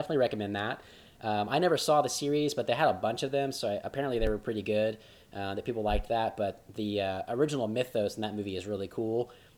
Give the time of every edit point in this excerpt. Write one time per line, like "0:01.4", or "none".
none